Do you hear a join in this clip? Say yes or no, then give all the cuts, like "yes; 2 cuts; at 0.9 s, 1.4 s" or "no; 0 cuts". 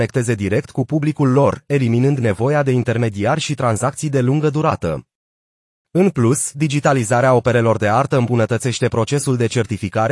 no; 0 cuts